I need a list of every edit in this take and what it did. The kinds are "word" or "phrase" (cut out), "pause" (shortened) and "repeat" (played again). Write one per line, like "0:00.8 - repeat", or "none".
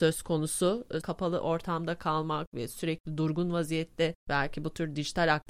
0:01.0 - word
0:04.2 - pause